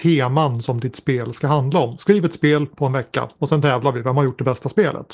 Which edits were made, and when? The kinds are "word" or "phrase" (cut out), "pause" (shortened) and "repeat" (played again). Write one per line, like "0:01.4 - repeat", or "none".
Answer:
none